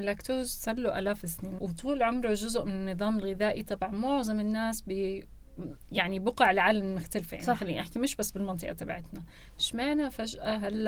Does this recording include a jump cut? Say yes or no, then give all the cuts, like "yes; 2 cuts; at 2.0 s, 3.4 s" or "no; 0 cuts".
yes; 1 cut; at 1.6 s